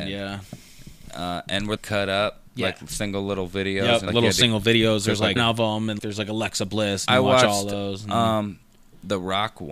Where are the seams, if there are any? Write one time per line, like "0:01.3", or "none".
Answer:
0:01.8
0:02.5
0:04.1
0:05.4
0:06.0